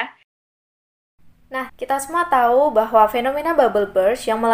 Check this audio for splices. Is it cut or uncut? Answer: cut